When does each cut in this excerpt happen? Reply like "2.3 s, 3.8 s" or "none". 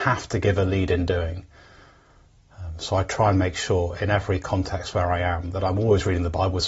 none